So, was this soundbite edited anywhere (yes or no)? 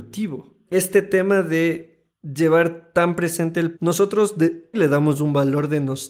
yes